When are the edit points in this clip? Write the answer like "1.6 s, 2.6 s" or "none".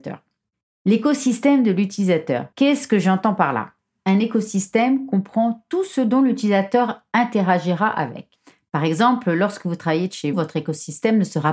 2.5 s, 10.3 s